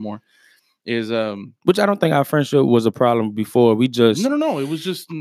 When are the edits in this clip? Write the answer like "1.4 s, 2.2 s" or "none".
none